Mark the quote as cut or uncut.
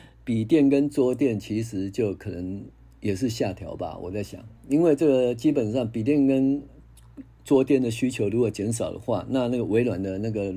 cut